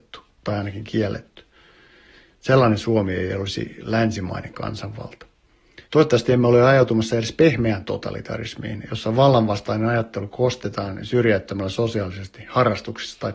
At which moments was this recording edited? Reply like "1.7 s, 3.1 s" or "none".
5.8 s